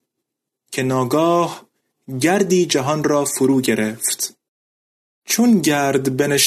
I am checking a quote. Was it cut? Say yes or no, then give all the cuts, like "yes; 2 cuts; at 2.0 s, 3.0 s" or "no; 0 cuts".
no; 0 cuts